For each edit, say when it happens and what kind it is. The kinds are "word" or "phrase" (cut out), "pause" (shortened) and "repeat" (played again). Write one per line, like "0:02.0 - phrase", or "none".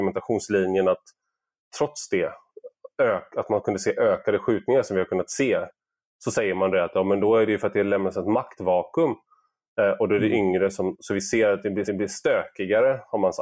0:11.8 - repeat